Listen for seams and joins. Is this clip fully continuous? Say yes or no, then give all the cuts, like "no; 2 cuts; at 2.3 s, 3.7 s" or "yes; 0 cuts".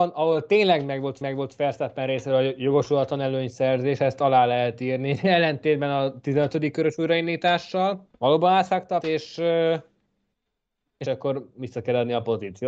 no; 4 cuts; at 1.2 s, 8.1 s, 9.0 s, 11.1 s